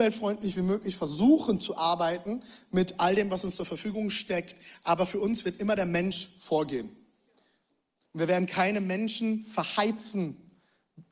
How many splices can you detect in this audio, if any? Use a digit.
0